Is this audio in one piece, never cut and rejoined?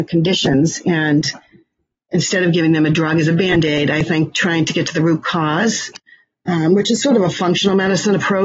yes; 0 cuts

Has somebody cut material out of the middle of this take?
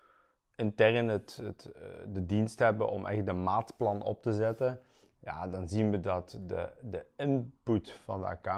no; 0 cuts

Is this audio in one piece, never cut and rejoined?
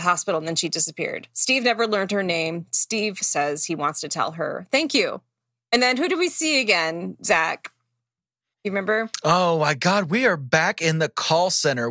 yes; 0 cuts

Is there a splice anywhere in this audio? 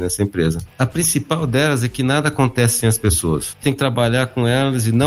yes; 1 cut; at 3.6 s

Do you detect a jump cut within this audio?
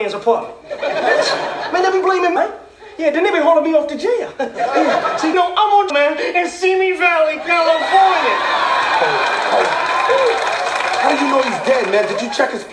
yes; 3 cuts; at 2.4 s, 5.3 s, 5.9 s

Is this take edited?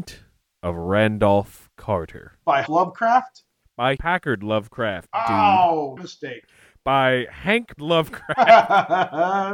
yes; 4 cuts; at 2.7 s, 4.0 s, 6.0 s, 7.8 s

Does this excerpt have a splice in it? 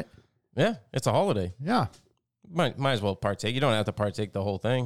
no; 0 cuts

